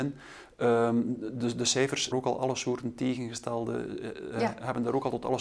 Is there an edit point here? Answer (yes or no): yes